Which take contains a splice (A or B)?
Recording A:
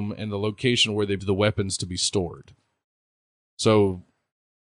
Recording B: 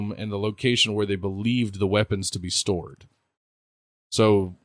A